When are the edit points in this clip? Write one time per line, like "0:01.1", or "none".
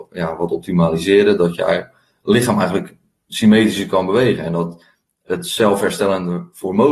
none